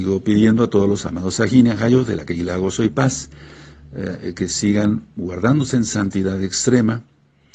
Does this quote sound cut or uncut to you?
uncut